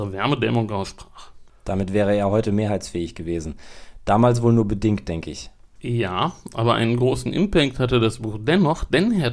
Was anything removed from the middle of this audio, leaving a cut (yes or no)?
no